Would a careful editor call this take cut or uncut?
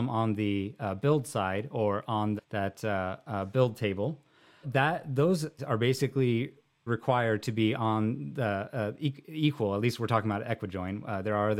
cut